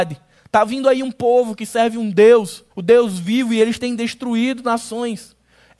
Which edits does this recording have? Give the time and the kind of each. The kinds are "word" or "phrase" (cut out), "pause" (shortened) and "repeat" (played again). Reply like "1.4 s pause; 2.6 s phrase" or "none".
2.7 s pause